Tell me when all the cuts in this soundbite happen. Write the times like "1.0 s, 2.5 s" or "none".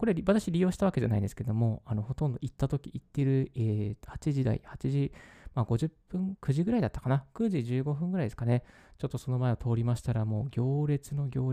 none